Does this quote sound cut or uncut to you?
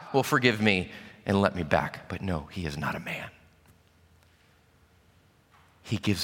uncut